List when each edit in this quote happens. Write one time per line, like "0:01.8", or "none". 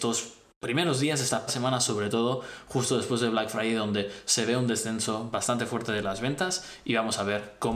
0:01.5